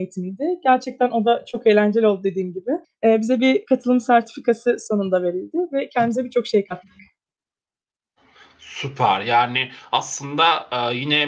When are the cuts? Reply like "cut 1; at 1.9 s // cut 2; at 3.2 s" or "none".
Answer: cut 1; at 2.8 s